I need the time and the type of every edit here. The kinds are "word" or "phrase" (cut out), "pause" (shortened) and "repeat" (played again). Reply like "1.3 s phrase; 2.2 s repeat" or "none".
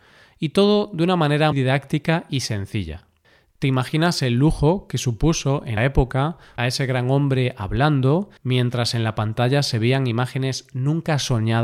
1.5 s word; 5.8 s word; 6.6 s phrase; 8.4 s pause